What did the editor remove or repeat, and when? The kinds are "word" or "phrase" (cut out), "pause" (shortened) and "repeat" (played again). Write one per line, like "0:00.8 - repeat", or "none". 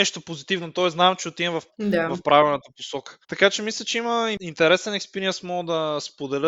0:01.7 - word
0:03.2 - pause